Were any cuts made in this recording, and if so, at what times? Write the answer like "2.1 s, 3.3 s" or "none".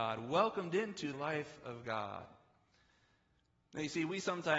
1.1 s